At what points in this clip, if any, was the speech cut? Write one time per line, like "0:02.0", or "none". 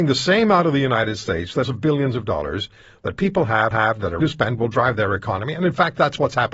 0:01.6
0:03.7
0:04.2